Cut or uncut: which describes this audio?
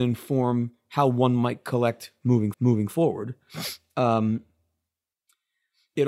cut